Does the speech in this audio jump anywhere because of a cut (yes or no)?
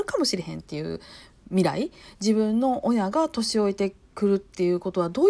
no